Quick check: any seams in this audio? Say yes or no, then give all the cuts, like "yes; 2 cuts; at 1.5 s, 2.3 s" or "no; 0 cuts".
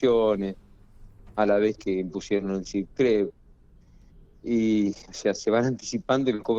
no; 0 cuts